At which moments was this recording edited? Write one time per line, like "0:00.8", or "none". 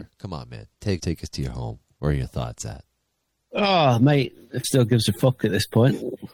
0:01.0
0:03.3
0:04.6